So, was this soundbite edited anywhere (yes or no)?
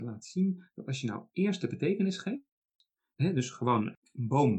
no